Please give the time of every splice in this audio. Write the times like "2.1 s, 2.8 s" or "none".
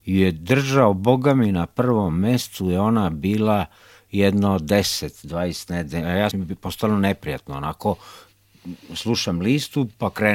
6.3 s